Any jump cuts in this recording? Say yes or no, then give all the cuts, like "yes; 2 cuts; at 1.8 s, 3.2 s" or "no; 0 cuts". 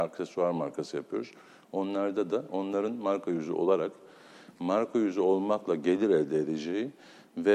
no; 0 cuts